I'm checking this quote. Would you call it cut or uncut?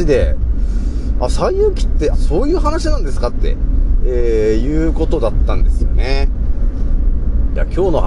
cut